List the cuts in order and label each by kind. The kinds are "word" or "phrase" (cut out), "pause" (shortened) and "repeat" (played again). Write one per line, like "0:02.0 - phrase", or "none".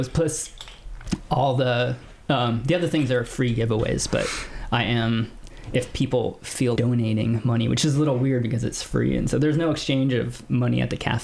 0:06.8 - word